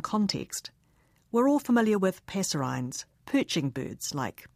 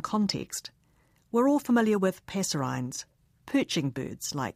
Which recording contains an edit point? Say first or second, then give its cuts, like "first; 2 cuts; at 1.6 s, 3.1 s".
first; 1 cut; at 3.1 s